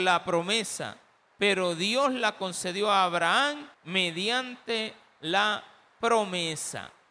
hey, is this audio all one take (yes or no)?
no